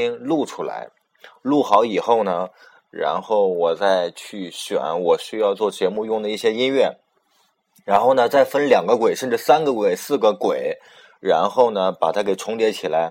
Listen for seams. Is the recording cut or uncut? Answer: uncut